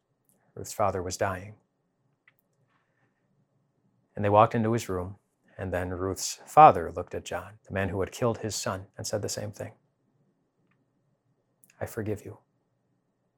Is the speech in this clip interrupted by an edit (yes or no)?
yes